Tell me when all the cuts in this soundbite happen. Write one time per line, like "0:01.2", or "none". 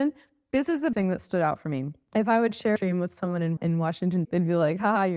0:00.9
0:02.8
0:03.6
0:04.2